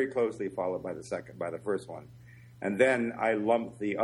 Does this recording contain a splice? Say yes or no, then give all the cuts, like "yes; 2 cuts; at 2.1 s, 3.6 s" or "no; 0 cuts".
no; 0 cuts